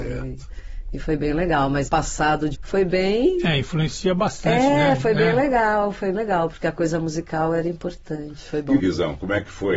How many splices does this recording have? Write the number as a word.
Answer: four